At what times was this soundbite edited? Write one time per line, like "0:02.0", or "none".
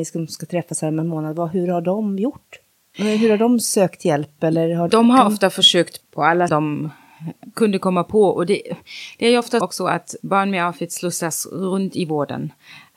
0:02.7
0:04.9
0:06.0
0:06.5
0:09.6